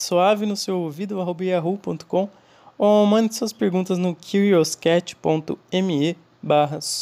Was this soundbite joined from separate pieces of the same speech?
no; 0 cuts

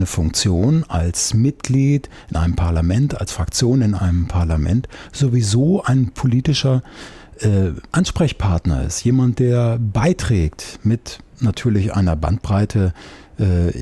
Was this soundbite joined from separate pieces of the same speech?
yes; 1 cut; at 7.9 s

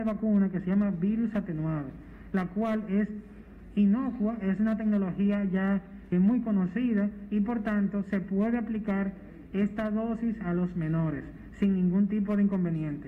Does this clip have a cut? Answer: yes; 1 cut; at 6.1 s

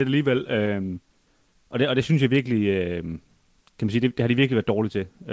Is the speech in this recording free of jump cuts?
yes; 0 cuts

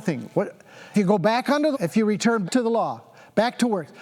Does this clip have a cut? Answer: yes; 3 cuts; at 0.9 s, 1.7 s, 2.4 s

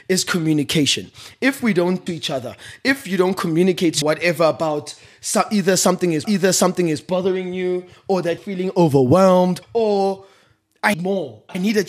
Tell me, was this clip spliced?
yes; 6 cuts; at 2.1 s, 4.0 s, 6.2 s, 8.4 s, 9.6 s, 10.9 s

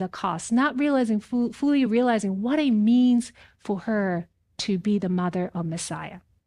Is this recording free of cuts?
yes; 0 cuts

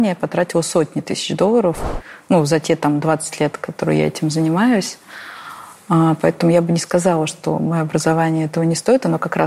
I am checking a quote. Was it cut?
no; 0 cuts

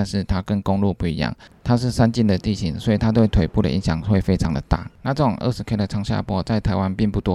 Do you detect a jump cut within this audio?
no; 0 cuts

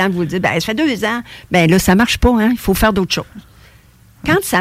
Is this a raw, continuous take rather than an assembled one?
yes; 0 cuts

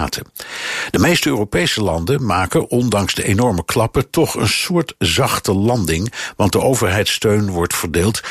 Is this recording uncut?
yes; 0 cuts

